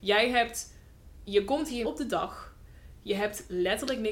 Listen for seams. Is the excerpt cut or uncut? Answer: cut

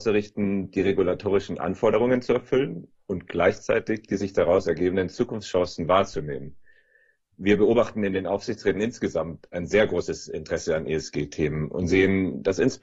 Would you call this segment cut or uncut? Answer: uncut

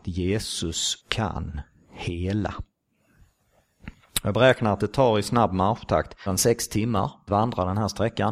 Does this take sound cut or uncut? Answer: cut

